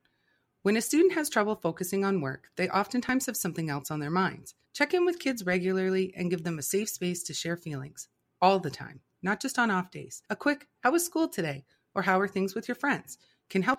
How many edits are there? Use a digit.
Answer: 2